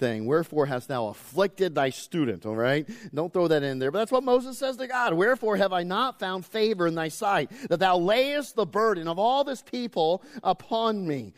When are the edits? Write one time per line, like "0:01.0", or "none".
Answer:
none